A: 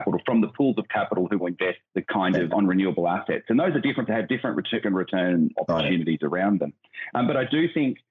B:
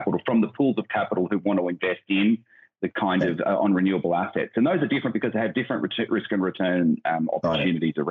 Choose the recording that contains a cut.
A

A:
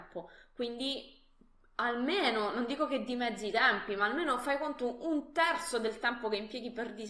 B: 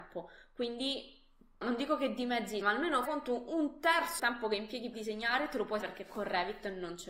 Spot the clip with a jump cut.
B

